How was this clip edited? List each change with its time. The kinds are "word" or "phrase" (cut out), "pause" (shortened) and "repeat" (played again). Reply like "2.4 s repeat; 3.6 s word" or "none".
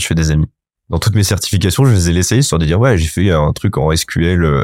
none